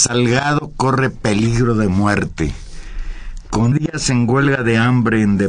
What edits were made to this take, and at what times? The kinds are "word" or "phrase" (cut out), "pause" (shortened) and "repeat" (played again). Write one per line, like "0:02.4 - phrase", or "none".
0:03.7 - word